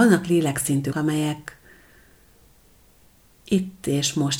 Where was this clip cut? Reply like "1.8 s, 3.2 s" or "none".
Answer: 0.9 s